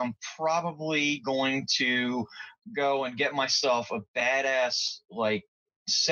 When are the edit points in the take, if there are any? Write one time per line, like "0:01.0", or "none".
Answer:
none